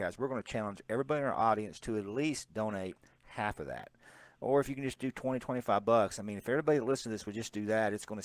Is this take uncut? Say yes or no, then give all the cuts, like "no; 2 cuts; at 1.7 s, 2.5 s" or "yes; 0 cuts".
yes; 0 cuts